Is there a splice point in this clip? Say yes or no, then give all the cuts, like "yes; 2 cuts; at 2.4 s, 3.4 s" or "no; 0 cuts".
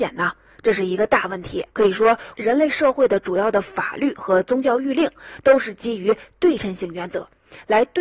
yes; 2 cuts; at 1.7 s, 2.3 s